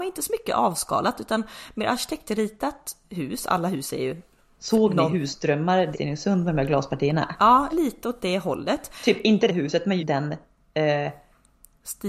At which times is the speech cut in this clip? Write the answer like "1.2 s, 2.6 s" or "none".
5.9 s, 7.7 s, 9.5 s, 10.0 s